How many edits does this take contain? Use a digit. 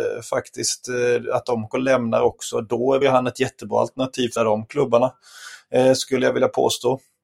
3